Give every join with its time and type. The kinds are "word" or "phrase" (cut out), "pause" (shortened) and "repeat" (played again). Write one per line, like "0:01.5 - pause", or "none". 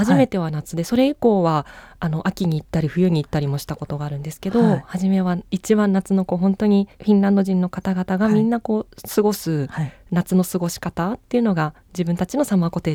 0:05.5 - pause
0:06.9 - pause